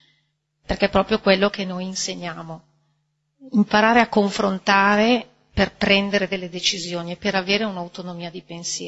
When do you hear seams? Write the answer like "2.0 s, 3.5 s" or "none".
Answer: none